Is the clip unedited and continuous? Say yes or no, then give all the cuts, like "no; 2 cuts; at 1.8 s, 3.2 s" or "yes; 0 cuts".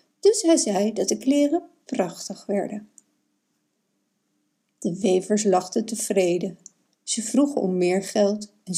yes; 0 cuts